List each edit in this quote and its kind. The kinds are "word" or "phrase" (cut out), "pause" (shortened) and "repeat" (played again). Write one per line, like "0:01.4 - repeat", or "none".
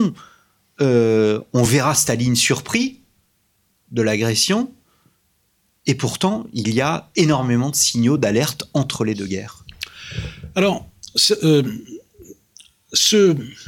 none

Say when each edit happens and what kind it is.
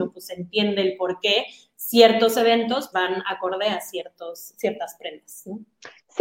0:02.9 - word

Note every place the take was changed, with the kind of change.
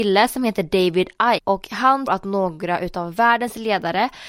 0:01.4 - word
0:02.1 - word

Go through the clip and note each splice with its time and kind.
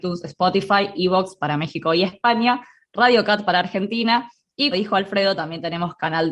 0:04.7 - word

